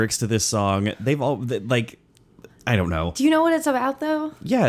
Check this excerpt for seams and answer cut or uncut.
uncut